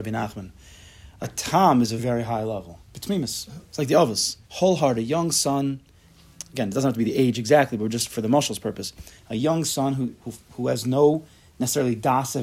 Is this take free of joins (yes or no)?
no